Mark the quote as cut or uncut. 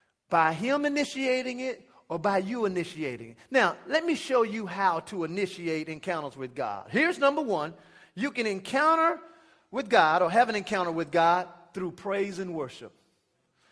uncut